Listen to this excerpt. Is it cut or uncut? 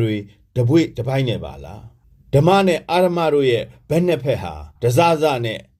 cut